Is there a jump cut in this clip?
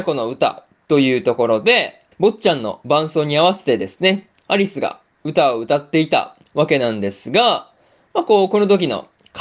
yes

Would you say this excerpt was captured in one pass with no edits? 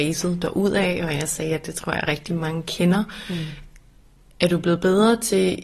yes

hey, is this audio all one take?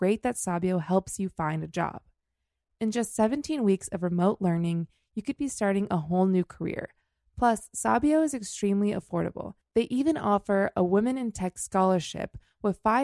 yes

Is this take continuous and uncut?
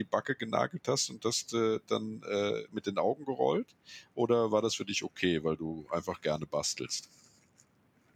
yes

